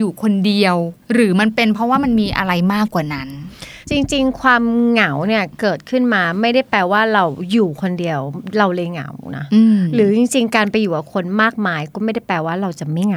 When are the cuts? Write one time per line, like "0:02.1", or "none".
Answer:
0:01.0
0:03.8